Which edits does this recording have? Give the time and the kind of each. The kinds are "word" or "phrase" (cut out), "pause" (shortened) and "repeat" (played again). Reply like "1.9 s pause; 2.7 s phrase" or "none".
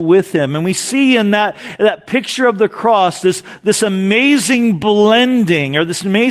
none